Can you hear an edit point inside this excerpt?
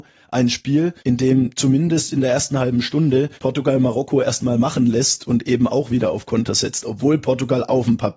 yes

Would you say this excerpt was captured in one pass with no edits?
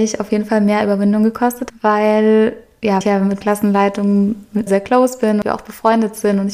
no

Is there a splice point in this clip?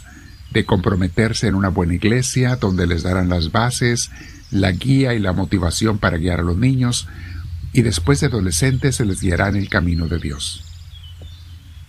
no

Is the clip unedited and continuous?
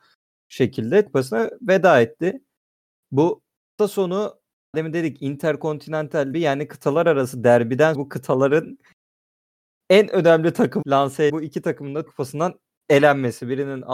no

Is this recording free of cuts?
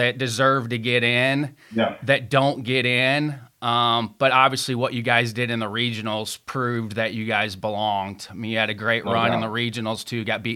yes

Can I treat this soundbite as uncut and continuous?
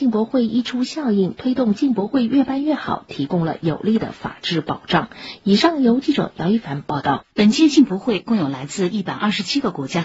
no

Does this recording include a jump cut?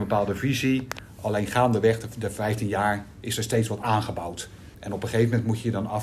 yes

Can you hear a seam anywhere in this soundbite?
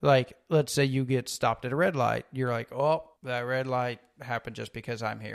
yes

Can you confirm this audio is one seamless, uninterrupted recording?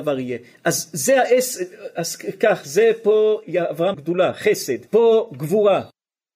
no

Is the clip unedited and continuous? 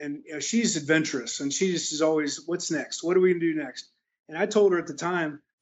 yes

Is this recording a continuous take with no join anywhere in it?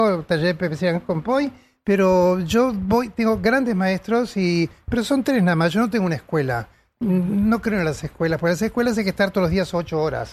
yes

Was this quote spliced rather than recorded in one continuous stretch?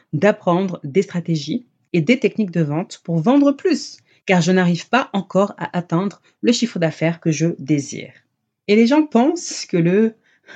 no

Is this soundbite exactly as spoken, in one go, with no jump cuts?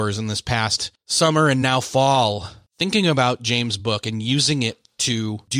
yes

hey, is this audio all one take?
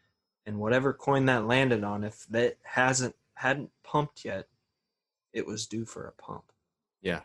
yes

